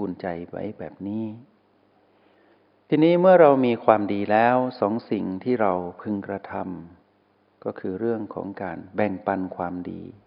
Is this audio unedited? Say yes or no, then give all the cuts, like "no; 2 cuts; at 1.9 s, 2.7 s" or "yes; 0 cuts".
yes; 0 cuts